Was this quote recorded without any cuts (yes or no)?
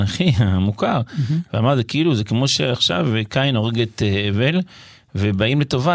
yes